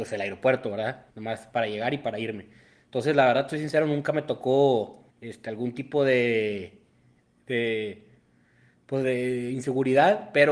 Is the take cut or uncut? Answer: cut